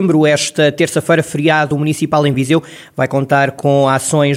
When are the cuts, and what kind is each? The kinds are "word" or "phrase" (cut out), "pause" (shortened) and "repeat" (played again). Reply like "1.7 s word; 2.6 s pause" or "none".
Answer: none